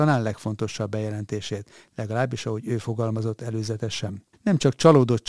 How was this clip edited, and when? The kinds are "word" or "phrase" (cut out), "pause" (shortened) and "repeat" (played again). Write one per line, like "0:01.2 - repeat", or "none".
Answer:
0:04.3 - pause

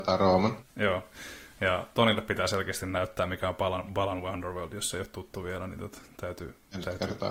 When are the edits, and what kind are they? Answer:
none

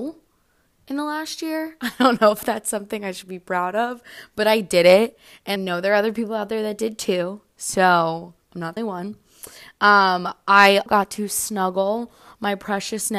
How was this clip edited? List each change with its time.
0:05.6 - word
0:08.8 - word
0:10.9 - word

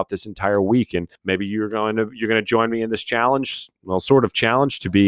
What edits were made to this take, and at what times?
0:01.2 - pause

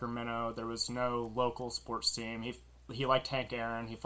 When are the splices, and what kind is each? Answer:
none

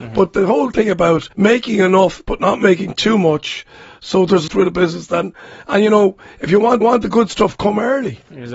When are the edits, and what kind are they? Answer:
0:01.3 - pause
0:04.5 - phrase
0:06.8 - repeat

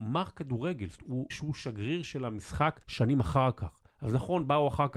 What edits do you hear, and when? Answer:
0:01.0 - word
0:01.3 - word
0:02.8 - pause
0:03.9 - pause

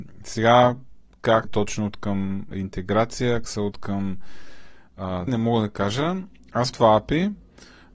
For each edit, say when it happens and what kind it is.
0:01.4 - word
0:02.5 - word
0:03.4 - word
0:05.3 - word
0:06.7 - word

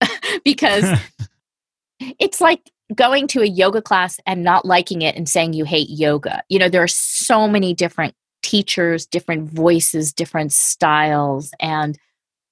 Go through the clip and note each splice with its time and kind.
none

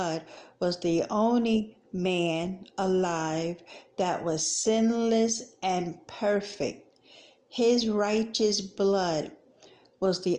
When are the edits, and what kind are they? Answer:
none

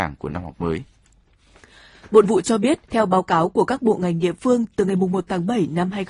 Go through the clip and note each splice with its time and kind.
0:02.2 - word
0:02.8 - pause

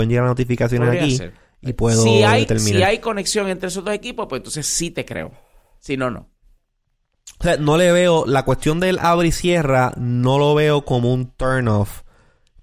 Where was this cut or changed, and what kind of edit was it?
none

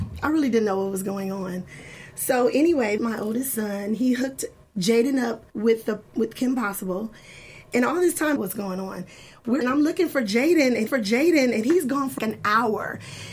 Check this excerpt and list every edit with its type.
0:03.0 - phrase
0:04.6 - pause
0:05.5 - pause
0:08.4 - phrase
0:09.6 - phrase
0:10.9 - repeat
0:12.2 - word

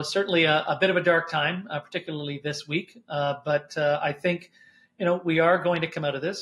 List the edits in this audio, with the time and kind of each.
none

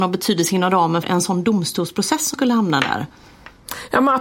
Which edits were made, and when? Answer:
0:01.0 - word
0:02.3 - word

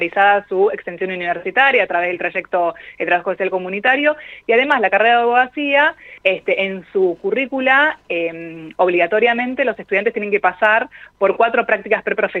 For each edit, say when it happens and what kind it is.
0:06.2 - pause

